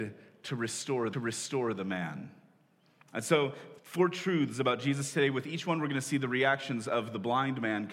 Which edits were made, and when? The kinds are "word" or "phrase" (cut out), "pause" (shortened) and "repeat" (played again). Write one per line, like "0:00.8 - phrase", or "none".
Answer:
0:01.1 - repeat
0:03.8 - pause